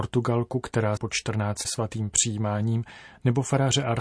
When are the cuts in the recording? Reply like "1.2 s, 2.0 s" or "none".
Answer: 1.0 s, 1.6 s